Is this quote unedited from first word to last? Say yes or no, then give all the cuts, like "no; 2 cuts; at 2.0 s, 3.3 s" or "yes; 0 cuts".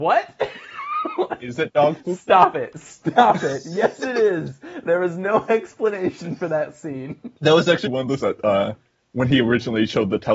no; 3 cuts; at 7.4 s, 7.9 s, 8.2 s